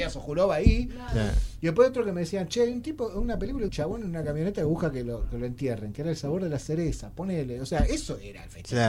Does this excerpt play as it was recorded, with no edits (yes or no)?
no